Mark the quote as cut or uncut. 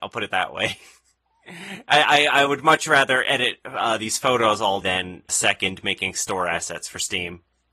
cut